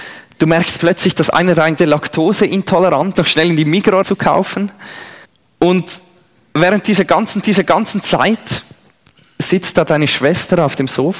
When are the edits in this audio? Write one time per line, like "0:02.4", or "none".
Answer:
0:01.8
0:03.1
0:04.0
0:05.2
0:07.4